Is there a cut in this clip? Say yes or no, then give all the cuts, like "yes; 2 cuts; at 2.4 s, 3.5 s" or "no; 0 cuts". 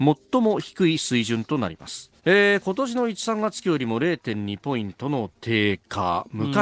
yes; 1 cut; at 2.2 s